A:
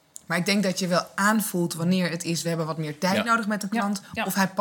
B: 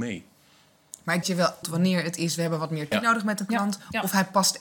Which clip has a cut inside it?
B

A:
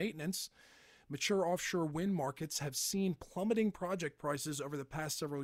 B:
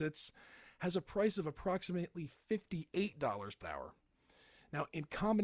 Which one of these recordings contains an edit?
B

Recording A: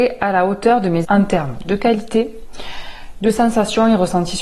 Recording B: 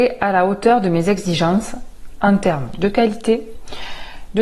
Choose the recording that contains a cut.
A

